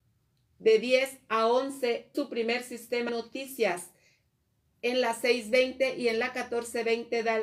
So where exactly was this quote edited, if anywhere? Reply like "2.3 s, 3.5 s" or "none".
2.1 s, 3.1 s